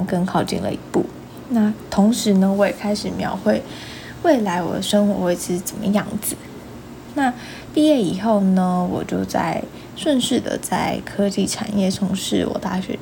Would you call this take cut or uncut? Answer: uncut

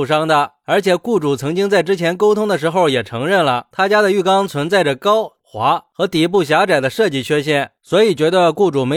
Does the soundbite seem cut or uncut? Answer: cut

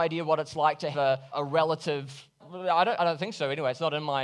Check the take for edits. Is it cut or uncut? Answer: cut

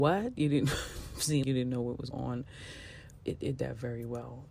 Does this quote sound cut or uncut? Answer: cut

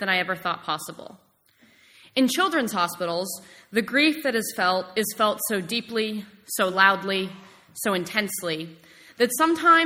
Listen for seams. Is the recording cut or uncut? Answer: uncut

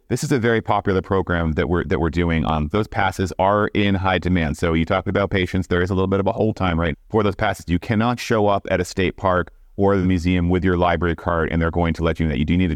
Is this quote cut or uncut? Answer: cut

